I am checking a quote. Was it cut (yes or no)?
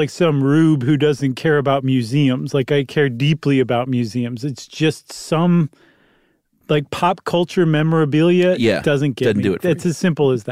no